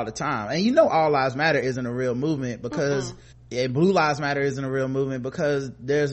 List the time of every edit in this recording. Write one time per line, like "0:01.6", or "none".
0:03.3

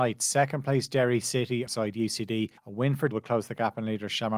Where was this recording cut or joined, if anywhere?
0:01.7
0:02.6
0:03.1

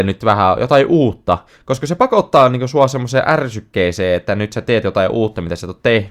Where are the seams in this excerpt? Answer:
none

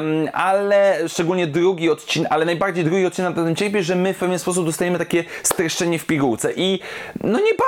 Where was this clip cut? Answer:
none

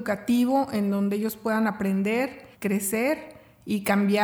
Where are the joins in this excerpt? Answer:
0:02.5

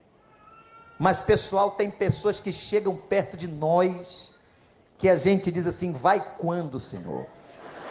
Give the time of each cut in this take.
none

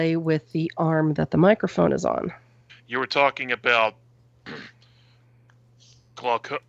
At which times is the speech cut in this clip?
0:02.7

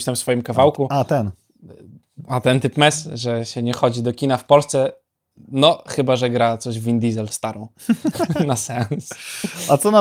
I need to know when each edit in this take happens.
0:07.3

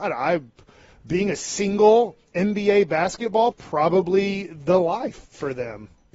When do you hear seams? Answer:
0:03.5

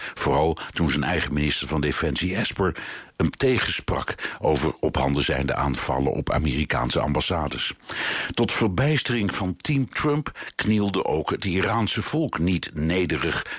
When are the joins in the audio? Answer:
none

